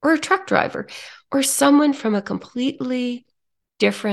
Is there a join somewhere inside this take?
no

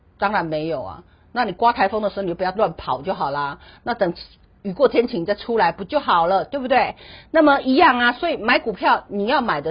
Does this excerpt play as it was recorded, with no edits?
yes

